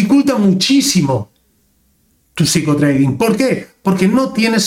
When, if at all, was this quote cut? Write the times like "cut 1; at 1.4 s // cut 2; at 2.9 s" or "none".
none